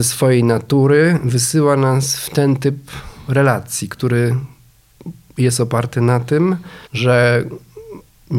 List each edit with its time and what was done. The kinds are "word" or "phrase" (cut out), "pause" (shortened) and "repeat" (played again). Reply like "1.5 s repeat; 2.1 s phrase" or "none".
6.9 s pause